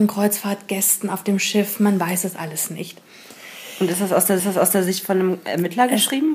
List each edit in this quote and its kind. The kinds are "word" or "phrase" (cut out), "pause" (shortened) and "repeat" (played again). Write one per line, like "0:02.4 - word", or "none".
0:04.4 - repeat